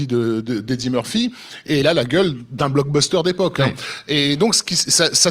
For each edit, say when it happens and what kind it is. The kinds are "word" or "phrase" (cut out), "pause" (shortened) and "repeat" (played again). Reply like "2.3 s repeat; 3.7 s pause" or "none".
1.8 s phrase